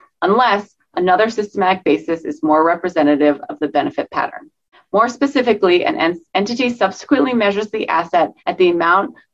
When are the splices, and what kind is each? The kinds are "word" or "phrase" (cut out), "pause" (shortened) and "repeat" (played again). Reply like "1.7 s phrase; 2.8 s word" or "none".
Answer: 4.7 s pause; 8.4 s pause